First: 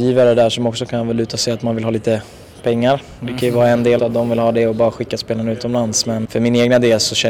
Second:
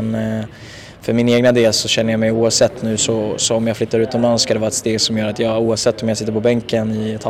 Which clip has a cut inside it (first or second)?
first